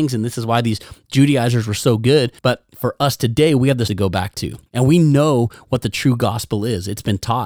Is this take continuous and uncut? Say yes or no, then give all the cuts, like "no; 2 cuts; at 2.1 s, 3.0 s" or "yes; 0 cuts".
no; 3 cuts; at 2.4 s, 3.9 s, 4.7 s